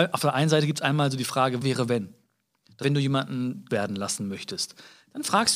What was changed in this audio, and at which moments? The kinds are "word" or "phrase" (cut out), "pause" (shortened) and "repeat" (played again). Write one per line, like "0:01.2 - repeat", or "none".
0:01.6 - word
0:02.8 - word
0:03.7 - word